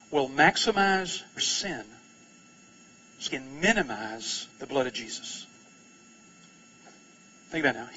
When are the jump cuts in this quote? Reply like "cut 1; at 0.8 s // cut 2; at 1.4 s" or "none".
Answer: cut 1; at 1.4 s // cut 2; at 3.3 s // cut 3; at 4.5 s